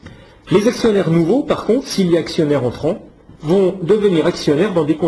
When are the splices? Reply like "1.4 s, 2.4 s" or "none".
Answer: 3.3 s